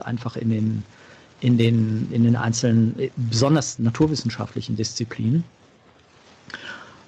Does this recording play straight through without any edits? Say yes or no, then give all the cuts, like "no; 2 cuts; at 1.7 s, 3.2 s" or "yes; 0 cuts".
no; 2 cuts; at 2.1 s, 3.8 s